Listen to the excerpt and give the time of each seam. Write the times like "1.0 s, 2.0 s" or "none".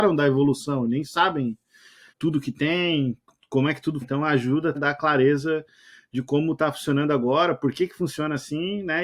2.1 s, 4.0 s, 4.7 s